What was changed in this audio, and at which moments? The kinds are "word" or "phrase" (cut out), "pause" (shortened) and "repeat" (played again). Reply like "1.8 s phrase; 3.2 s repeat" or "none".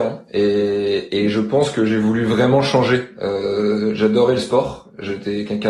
none